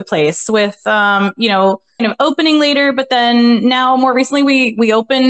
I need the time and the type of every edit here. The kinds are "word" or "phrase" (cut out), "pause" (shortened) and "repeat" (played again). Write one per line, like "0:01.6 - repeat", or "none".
0:02.0 - word